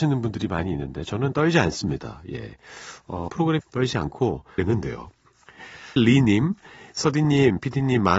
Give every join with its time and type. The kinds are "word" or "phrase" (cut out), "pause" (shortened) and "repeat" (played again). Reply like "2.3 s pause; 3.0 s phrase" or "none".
3.3 s word; 3.6 s word; 4.6 s word; 6.0 s word